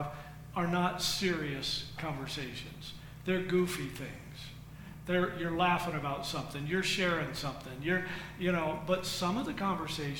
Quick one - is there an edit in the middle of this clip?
no; 0 cuts

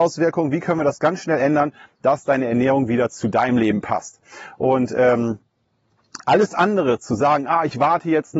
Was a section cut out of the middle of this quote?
no; 0 cuts

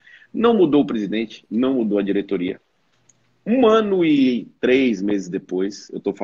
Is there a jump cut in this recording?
no; 0 cuts

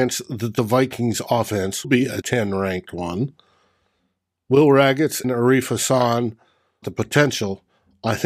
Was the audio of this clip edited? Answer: yes; 4 cuts; at 1.8 s, 2.2 s, 5.2 s, 6.8 s

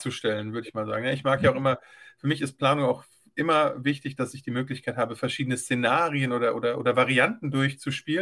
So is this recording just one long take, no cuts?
yes; 0 cuts

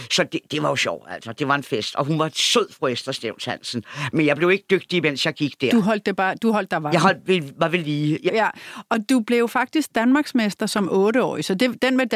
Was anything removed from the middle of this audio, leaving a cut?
yes; 1 cut; at 8.3 s

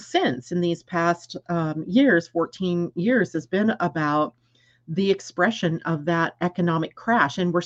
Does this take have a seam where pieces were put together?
no; 0 cuts

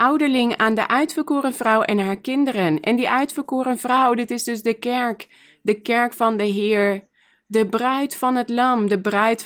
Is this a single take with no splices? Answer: yes; 0 cuts

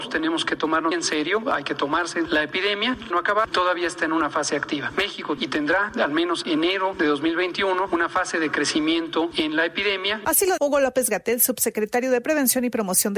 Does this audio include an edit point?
yes; 6 cuts; at 0.9 s, 2.3 s, 3.1 s, 5.4 s, 6.4 s, 10.6 s

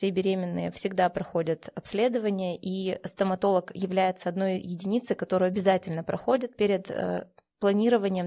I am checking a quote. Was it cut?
no; 0 cuts

